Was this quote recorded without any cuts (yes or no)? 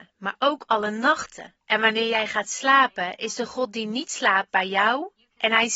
no